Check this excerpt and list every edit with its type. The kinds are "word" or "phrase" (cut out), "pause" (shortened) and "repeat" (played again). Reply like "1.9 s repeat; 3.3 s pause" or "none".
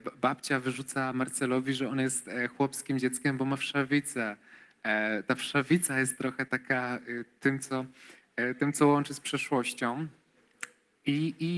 6.5 s word